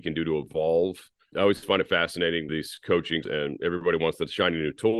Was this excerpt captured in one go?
no; 3 cuts; at 1.3 s, 2.5 s, 3.2 s

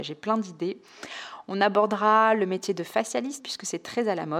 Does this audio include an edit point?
yes; 1 cut; at 3.4 s

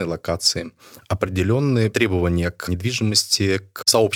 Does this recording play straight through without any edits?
yes; 0 cuts

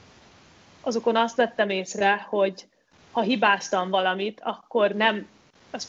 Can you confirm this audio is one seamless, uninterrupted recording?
yes; 0 cuts

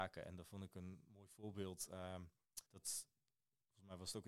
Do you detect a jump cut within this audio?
yes; 1 cut; at 2.7 s

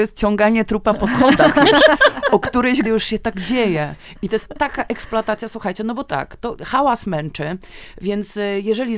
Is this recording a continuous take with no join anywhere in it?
no; 2 cuts; at 2.8 s, 6.1 s

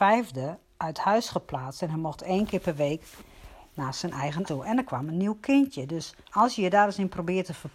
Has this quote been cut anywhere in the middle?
yes; 2 cuts; at 4.5 s, 6.2 s

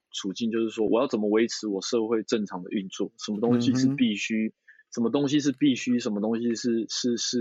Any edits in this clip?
no; 0 cuts

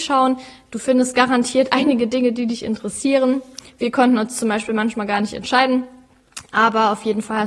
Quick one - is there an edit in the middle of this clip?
no; 0 cuts

